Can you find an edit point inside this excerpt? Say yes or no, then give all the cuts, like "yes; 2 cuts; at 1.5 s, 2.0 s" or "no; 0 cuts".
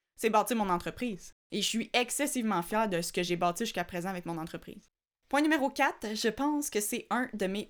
no; 0 cuts